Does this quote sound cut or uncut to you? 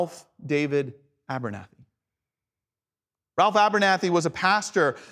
uncut